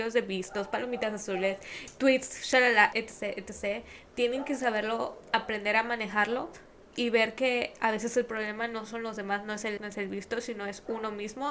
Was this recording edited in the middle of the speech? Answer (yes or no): yes